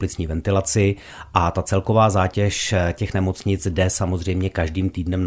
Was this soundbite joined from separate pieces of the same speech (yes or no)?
no